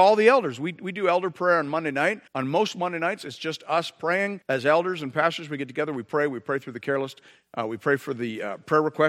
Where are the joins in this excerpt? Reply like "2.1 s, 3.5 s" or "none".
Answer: 2.3 s, 4.4 s